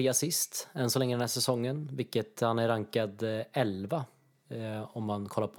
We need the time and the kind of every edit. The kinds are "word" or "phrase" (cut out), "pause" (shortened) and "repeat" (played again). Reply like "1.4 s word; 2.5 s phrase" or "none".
none

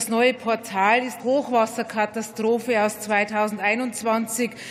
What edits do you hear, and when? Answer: 1.2 s word

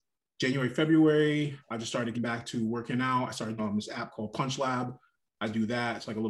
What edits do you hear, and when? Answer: 1.6 s pause; 2.1 s word; 3.6 s phrase

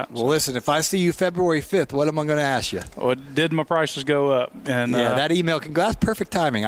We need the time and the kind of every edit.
none

